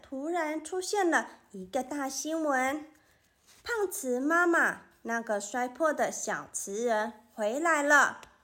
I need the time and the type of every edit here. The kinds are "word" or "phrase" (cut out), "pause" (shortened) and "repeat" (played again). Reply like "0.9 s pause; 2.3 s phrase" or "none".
none